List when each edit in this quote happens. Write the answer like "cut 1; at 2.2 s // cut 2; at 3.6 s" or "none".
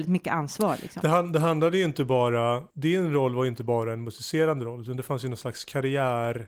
cut 1; at 2.7 s